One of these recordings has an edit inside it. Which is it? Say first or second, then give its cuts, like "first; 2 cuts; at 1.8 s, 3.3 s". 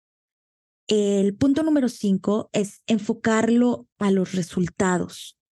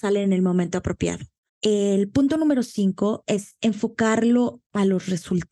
second; 1 cut; at 1.5 s